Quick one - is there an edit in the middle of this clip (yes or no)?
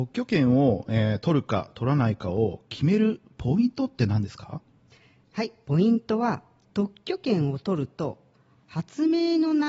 no